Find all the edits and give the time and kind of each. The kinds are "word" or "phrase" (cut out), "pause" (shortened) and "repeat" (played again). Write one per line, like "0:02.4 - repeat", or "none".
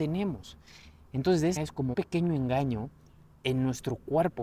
0:01.6 - word
0:01.9 - word

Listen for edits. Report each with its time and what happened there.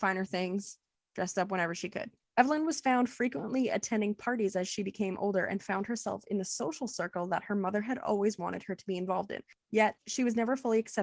none

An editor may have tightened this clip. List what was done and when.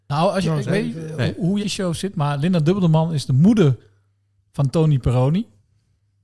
0:01.6 - phrase

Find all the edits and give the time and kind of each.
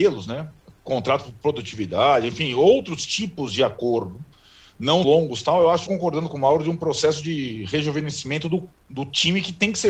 0:05.0 - word
0:05.9 - phrase

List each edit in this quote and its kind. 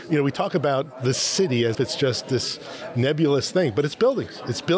0:01.7 - word

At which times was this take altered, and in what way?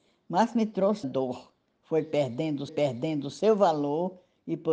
0:01.0 - word
0:02.7 - repeat

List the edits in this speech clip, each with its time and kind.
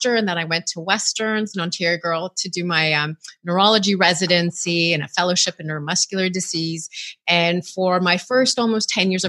0:01.5 - phrase

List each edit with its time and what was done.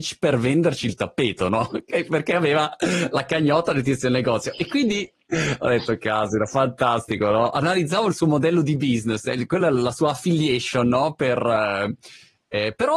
none

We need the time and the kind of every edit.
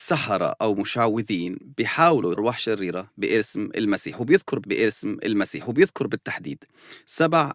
0:02.3 - word
0:04.6 - repeat

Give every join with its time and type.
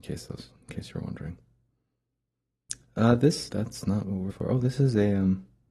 0:03.5 - word
0:04.3 - word

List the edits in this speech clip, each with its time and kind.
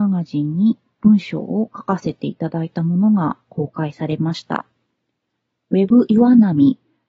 none

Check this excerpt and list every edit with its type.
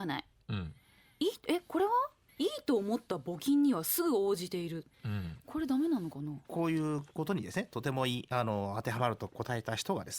0:02.3 - pause
0:04.9 - pause
0:06.4 - pause

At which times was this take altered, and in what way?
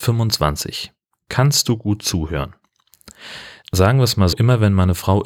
0:04.3 - word

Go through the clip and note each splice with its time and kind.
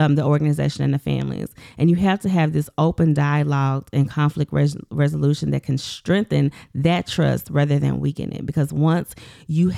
none

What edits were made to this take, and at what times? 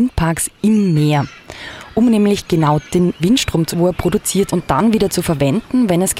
0:02.9 - word
0:03.2 - word
0:03.7 - word
0:04.5 - word

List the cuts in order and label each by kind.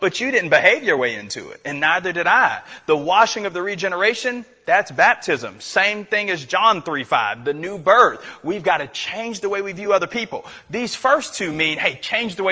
none

